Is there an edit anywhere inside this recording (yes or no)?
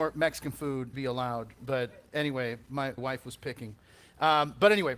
yes